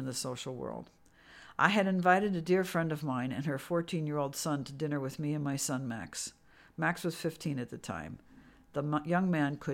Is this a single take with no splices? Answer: yes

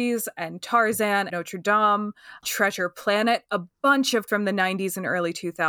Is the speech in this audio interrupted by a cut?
yes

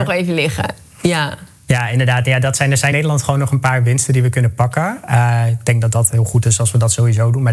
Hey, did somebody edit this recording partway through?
yes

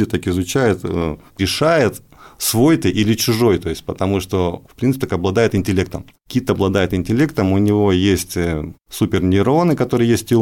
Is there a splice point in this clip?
yes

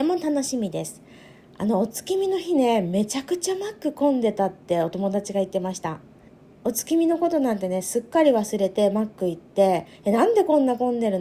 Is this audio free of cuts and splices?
yes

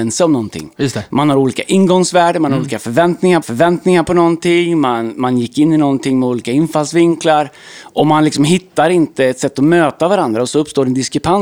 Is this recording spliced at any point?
yes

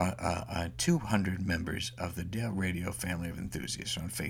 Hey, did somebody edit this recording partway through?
no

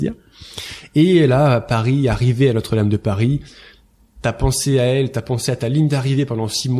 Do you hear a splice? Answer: no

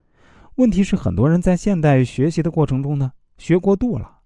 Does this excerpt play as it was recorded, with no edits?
yes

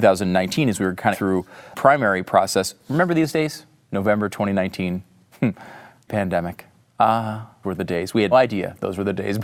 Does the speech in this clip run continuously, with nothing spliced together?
no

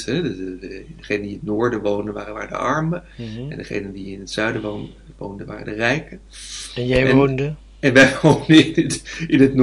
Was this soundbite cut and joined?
no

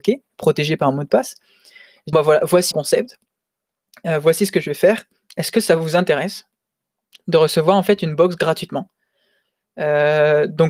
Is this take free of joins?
no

